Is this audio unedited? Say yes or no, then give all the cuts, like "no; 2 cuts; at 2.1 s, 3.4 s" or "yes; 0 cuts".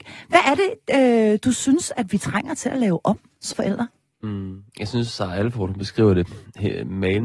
no; 1 cut; at 3.5 s